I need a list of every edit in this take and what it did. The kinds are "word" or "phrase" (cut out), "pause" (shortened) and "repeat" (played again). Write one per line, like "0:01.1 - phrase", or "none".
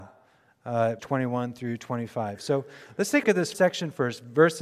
0:01.0 - word
0:03.2 - word
0:03.5 - word